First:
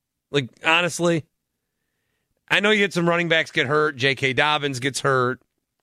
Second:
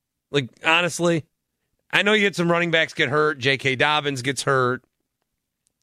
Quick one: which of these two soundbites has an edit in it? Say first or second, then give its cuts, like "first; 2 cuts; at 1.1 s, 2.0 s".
second; 1 cut; at 1.6 s